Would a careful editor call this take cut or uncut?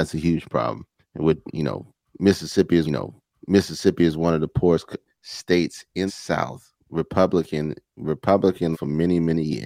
cut